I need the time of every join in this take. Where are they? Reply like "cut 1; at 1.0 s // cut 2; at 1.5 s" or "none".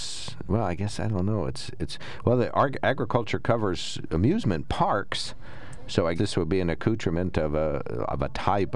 cut 1; at 6.2 s

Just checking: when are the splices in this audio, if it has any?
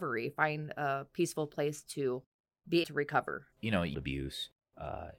cut 1; at 2.8 s // cut 2; at 3.5 s // cut 3; at 3.9 s

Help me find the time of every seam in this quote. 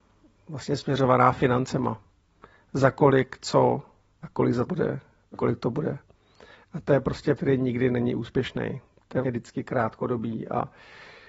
cut 1; at 4.7 s // cut 2; at 5.3 s // cut 3; at 7.4 s // cut 4; at 9.2 s

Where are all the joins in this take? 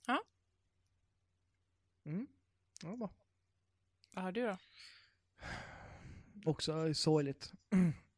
cut 1; at 6.5 s

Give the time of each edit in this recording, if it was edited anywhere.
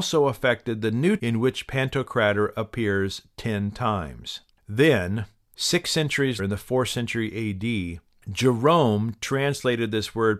cut 1; at 1.2 s // cut 2; at 4.5 s // cut 3; at 6.4 s

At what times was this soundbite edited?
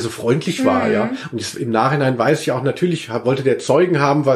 none

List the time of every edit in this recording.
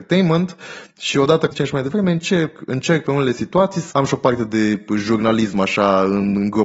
cut 1; at 1.5 s // cut 2; at 3.9 s

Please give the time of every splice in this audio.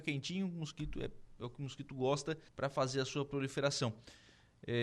cut 1; at 2.5 s

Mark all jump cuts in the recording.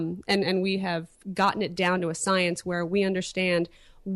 none

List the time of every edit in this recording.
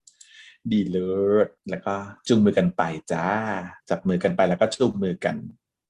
cut 1; at 1.6 s // cut 2; at 3.8 s

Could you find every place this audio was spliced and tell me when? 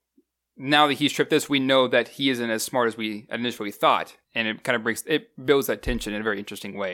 cut 1; at 4.2 s

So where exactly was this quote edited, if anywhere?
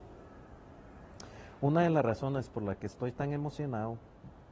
none

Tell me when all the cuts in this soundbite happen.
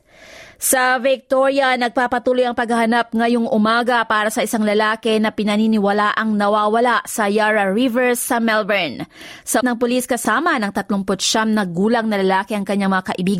cut 1; at 9.6 s

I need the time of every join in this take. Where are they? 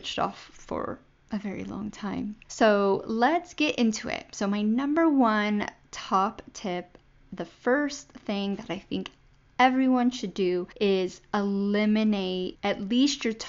none

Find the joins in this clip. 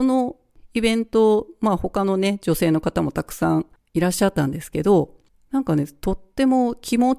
none

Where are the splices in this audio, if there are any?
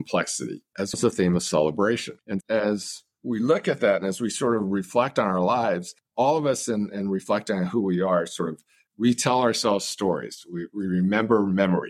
cut 1; at 0.9 s // cut 2; at 2.4 s

